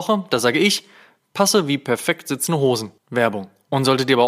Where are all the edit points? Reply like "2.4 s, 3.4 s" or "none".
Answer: 3.0 s